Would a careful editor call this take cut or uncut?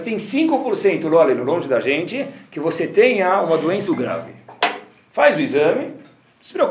cut